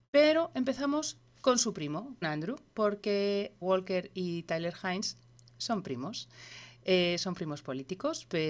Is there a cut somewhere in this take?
yes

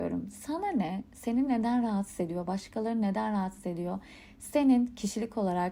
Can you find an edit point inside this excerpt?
no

